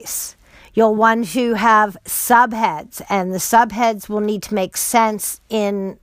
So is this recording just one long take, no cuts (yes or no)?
yes